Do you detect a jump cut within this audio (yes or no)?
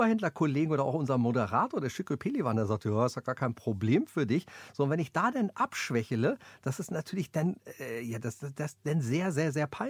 no